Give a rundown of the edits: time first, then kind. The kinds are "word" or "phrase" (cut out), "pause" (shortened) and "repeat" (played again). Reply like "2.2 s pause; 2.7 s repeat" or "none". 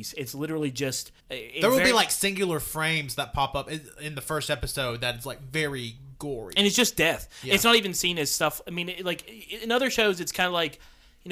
1.2 s pause